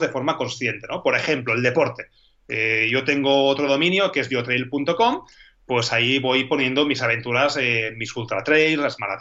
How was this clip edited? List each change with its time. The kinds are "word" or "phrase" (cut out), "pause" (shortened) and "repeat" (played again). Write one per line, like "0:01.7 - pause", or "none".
none